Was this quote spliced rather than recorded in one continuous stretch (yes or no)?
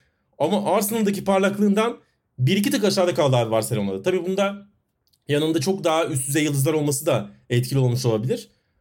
no